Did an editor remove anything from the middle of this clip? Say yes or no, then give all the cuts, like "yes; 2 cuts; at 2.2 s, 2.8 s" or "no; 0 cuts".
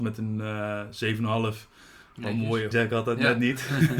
yes; 1 cut; at 2.7 s